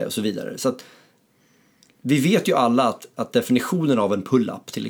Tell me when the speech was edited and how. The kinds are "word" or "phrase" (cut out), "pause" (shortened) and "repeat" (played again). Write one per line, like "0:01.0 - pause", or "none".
none